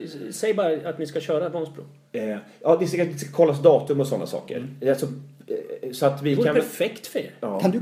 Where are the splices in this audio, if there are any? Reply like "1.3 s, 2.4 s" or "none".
none